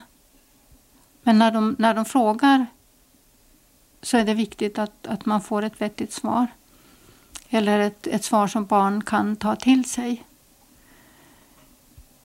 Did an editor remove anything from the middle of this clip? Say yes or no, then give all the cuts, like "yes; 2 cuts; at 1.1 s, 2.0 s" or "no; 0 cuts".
no; 0 cuts